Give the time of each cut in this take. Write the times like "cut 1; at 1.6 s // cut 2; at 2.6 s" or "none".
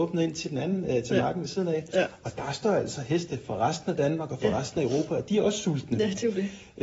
none